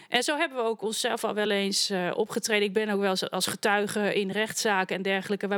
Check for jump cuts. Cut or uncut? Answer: uncut